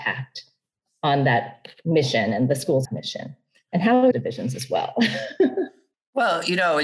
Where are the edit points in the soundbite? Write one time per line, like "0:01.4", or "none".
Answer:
0:02.8
0:04.1